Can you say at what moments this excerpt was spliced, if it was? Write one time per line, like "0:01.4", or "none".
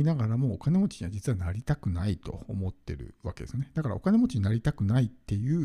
none